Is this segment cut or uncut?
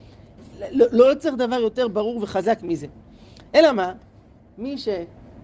uncut